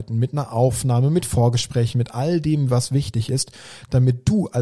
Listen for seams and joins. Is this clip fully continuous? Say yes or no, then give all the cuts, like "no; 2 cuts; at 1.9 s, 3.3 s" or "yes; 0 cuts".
yes; 0 cuts